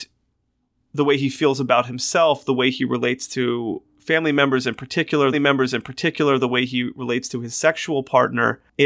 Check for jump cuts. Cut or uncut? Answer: cut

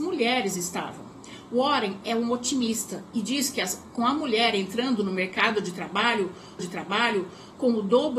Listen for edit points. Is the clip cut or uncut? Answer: cut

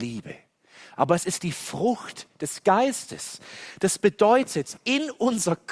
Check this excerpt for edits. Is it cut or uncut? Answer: uncut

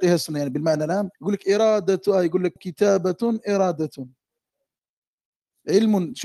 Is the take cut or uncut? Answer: cut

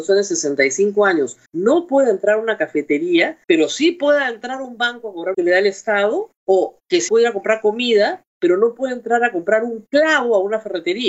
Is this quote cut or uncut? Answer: cut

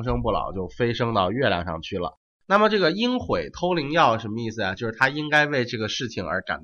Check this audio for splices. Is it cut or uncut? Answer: uncut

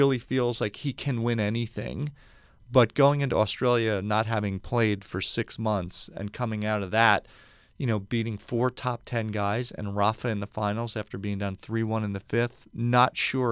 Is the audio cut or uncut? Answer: uncut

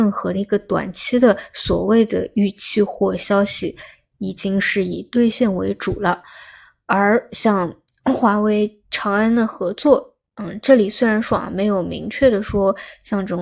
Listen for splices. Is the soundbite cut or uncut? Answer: uncut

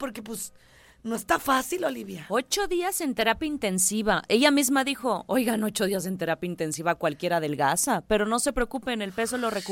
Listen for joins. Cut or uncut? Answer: uncut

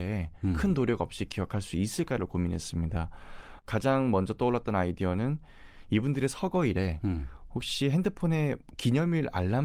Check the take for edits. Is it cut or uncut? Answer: uncut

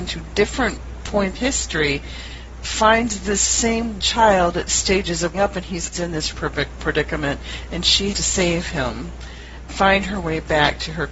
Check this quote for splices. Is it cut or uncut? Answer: cut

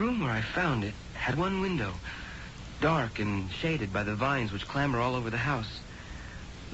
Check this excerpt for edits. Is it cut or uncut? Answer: cut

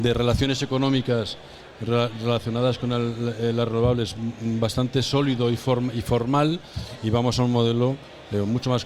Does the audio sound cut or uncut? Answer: uncut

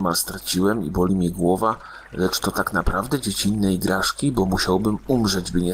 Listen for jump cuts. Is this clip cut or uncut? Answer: uncut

